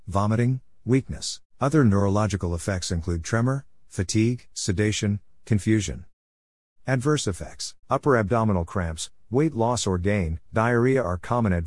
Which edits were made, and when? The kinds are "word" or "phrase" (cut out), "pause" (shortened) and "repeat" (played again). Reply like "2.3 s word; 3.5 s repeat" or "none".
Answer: 1.5 s pause; 4.5 s pause; 7.8 s pause; 10.5 s pause